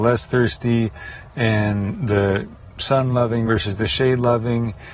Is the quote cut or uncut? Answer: uncut